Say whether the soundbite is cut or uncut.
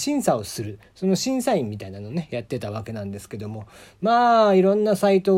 uncut